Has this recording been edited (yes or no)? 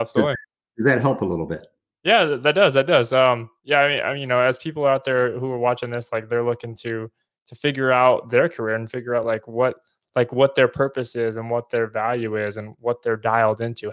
no